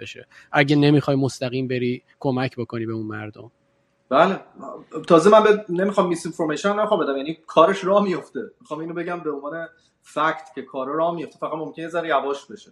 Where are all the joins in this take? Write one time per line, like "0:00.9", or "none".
none